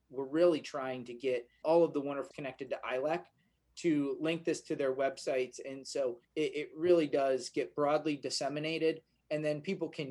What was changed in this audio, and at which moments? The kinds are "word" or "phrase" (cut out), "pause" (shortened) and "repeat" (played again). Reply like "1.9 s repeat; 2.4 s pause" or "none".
1.6 s word; 2.3 s phrase; 6.2 s pause